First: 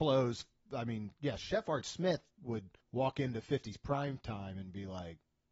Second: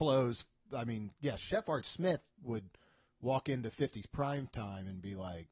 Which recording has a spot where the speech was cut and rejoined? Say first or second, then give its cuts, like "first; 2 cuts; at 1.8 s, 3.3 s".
first; 1 cut; at 2.8 s